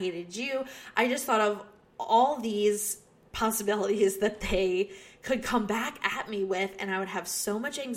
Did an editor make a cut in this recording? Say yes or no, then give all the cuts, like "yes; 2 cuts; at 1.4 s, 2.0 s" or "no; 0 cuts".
no; 0 cuts